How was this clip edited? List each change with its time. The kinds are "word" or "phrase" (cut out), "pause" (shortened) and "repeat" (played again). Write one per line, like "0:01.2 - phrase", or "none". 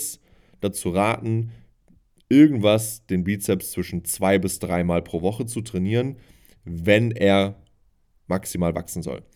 none